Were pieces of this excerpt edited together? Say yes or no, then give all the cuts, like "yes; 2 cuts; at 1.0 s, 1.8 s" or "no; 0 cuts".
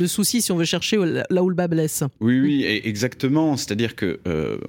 yes; 1 cut; at 2.2 s